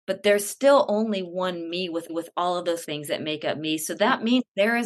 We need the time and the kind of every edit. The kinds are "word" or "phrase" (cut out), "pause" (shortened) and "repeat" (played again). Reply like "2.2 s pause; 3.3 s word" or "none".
2.1 s repeat; 2.8 s word